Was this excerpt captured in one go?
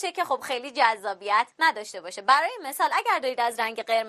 no; 1 cut; at 1.5 s

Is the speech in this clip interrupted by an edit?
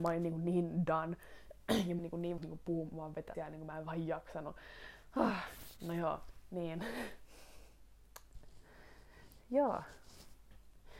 yes; 3 cuts; at 2.0 s, 2.4 s, 3.3 s

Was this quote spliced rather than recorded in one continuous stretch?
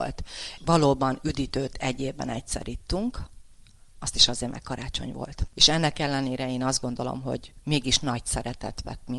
no; 0 cuts

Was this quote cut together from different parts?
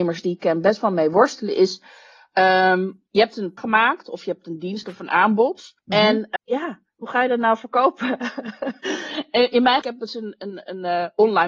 yes; 5 cuts; at 3.1 s, 3.6 s, 5.8 s, 6.4 s, 9.8 s

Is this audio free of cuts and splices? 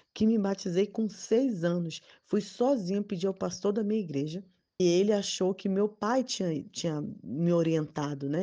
no; 1 cut; at 4.8 s

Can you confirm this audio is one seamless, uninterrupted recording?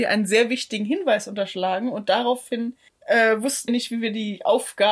no; 2 cuts; at 2.9 s, 3.7 s

